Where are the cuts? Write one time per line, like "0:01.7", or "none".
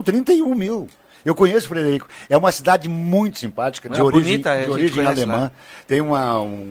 none